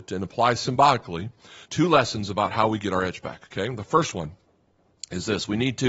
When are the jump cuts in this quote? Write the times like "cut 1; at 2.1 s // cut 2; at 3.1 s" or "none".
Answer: cut 1; at 1.6 s

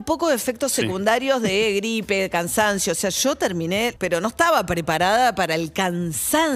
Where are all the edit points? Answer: cut 1; at 4.0 s

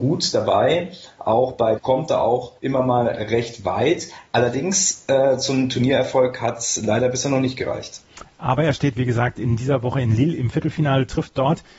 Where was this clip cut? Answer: cut 1; at 1.8 s // cut 2; at 2.6 s

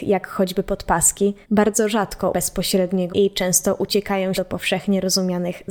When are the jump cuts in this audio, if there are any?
cut 1; at 1.4 s // cut 2; at 2.3 s // cut 3; at 3.1 s // cut 4; at 4.3 s

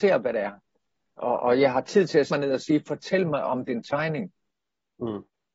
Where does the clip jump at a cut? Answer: cut 1; at 2.3 s

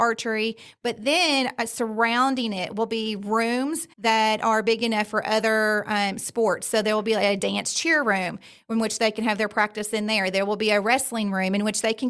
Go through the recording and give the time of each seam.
cut 1; at 3.9 s

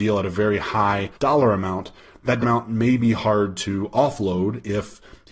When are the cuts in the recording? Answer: cut 1; at 1.1 s // cut 2; at 2.4 s

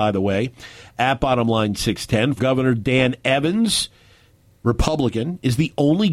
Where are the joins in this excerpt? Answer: cut 1; at 2.4 s

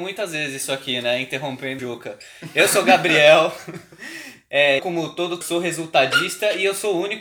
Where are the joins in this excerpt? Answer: cut 1; at 1.8 s // cut 2; at 4.8 s // cut 3; at 5.4 s

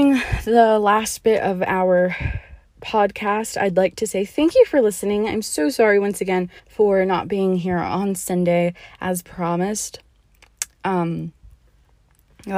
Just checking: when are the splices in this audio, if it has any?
cut 1; at 6.6 s

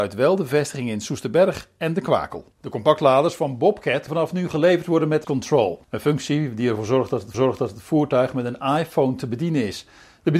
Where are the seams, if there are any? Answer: cut 1; at 2.5 s // cut 2; at 4.1 s // cut 3; at 5.2 s // cut 4; at 5.8 s // cut 5; at 7.3 s

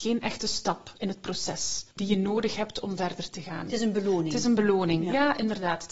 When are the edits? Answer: none

